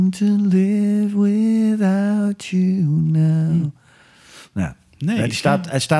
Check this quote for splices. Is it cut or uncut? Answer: uncut